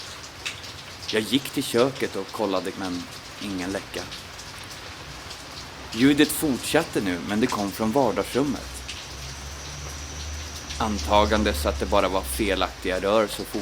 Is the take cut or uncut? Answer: cut